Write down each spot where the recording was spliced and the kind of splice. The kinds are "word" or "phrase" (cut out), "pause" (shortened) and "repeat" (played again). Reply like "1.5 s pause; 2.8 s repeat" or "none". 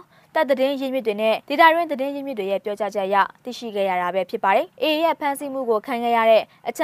1.4 s pause; 4.7 s pause